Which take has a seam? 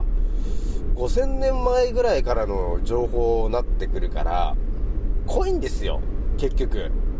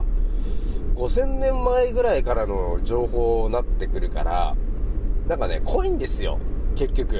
first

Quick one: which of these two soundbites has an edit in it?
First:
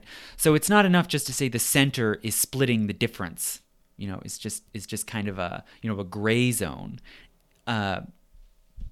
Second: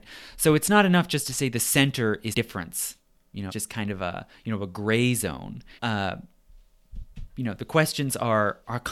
second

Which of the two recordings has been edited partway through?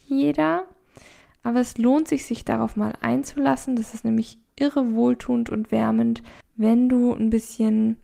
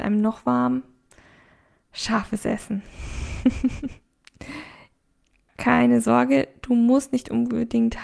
first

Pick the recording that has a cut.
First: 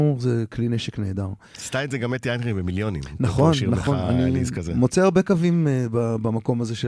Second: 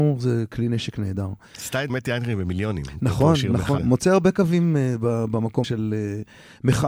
second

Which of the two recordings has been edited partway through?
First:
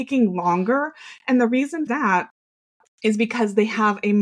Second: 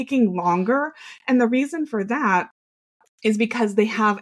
first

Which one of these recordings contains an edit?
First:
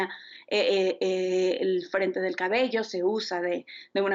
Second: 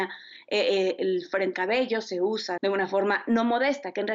second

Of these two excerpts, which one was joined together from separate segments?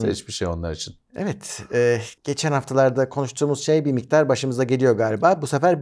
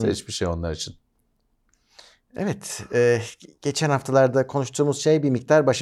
first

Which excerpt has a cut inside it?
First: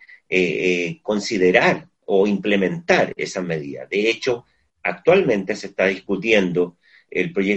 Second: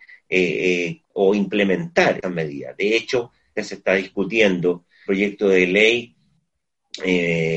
second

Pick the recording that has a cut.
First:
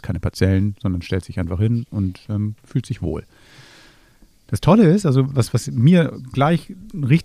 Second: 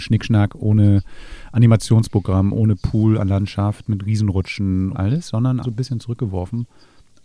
second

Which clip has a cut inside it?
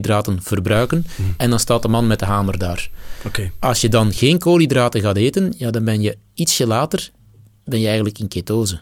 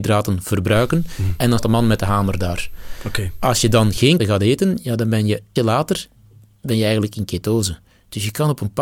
second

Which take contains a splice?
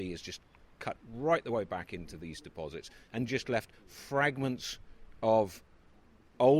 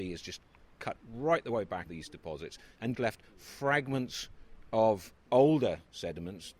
second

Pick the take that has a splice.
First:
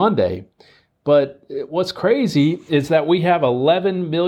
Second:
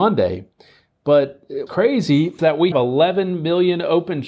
second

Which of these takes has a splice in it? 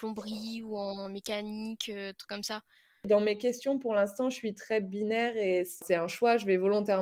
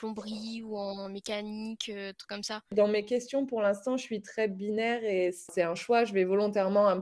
second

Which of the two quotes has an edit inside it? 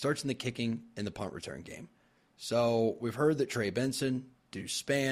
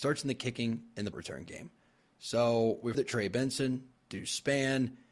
second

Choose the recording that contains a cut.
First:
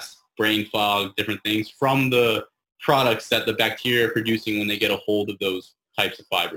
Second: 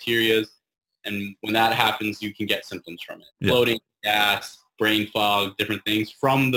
second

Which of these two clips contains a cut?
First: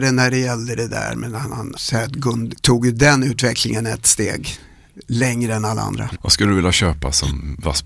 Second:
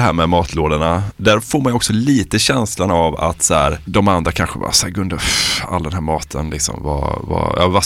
first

